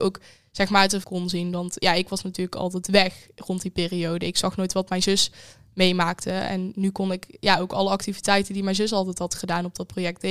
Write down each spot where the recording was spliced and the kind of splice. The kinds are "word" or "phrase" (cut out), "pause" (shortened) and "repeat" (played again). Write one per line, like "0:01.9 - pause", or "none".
0:01.0 - phrase